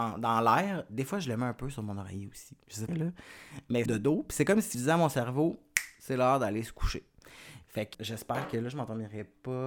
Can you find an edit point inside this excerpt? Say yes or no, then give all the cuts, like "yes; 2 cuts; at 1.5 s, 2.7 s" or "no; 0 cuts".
yes; 4 cuts; at 2.9 s, 3.9 s, 4.7 s, 7.9 s